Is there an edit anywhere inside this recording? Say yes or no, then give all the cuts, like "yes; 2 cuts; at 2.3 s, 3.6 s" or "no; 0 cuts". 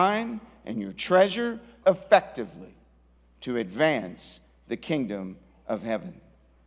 yes; 1 cut; at 1.8 s